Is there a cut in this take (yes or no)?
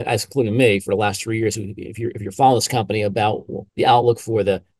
yes